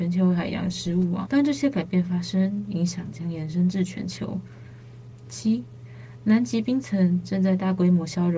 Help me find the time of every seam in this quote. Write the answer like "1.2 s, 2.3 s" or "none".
1.3 s